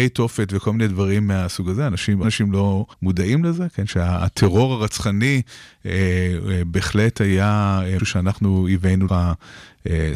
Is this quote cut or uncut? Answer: cut